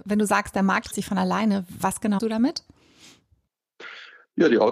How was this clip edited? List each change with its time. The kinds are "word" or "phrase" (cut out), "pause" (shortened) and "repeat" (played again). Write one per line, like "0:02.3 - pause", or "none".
0:00.9 - word
0:02.2 - word